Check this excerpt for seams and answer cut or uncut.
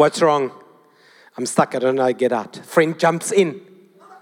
uncut